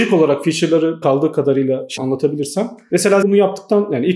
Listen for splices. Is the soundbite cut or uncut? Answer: cut